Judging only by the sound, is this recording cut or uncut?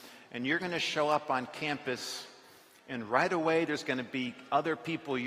uncut